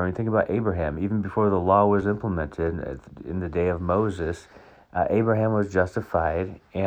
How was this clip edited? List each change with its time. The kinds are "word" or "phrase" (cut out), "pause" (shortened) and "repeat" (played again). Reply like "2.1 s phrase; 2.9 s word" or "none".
none

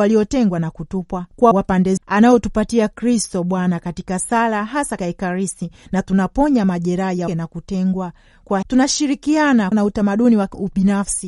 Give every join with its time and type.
1.5 s word; 2.0 s word; 5.0 s word; 7.3 s word; 8.6 s word; 9.7 s word

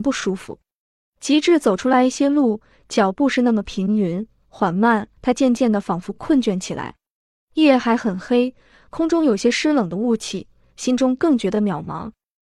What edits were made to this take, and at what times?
5.2 s pause

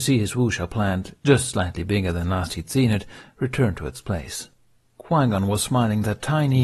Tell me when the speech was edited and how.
none

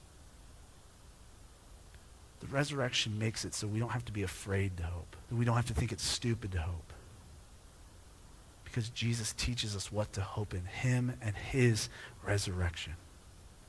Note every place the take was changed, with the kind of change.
5.2 s pause

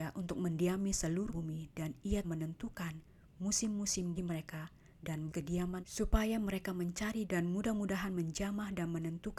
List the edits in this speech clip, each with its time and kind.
1.3 s word; 2.2 s word; 4.2 s word; 5.3 s word; 5.8 s word; 7.2 s word

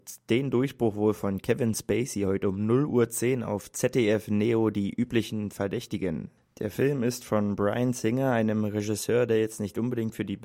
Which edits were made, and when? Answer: none

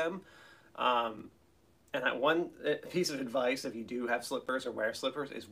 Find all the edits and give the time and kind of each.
none

